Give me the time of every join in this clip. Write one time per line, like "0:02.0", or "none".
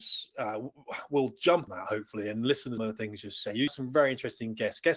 0:01.7
0:02.8
0:03.7